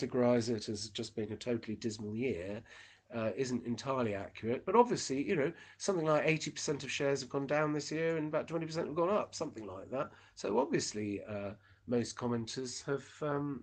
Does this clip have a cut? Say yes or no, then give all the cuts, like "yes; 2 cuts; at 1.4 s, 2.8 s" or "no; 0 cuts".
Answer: no; 0 cuts